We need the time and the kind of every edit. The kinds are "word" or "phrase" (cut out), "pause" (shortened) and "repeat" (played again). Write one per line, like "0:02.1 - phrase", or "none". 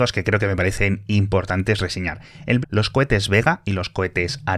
0:02.6 - word